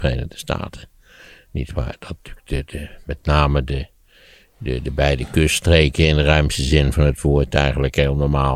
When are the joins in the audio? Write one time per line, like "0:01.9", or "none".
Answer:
none

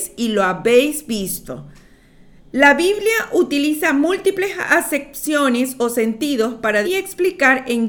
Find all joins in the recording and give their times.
0:06.8

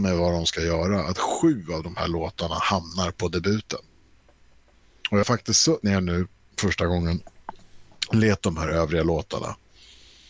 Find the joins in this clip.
0:05.2
0:05.8
0:08.4

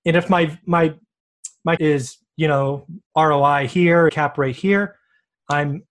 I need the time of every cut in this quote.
0:01.8
0:03.1
0:04.1

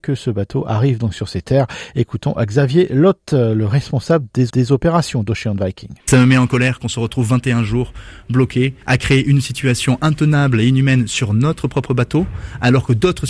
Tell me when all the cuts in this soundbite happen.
0:04.5
0:06.0
0:08.8

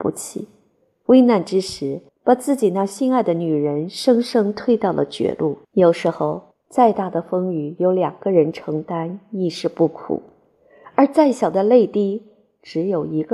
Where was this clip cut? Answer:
0:02.1
0:05.6
0:06.5

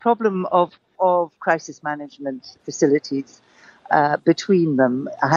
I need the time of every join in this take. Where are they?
0:01.0
0:01.4
0:02.6

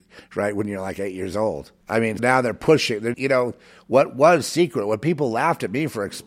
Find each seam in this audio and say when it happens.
0:01.8
0:02.2
0:03.1

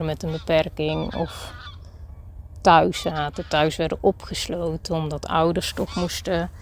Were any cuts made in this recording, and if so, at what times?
none

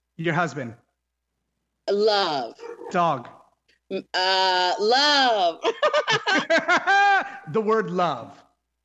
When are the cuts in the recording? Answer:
0:03.7

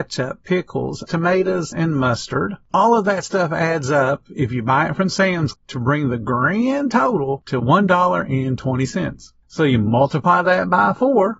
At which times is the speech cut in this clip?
0:01.1
0:01.7
0:05.5

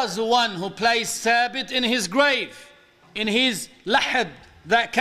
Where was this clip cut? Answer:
none

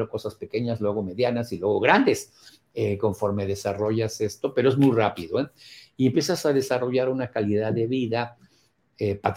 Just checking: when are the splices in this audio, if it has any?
none

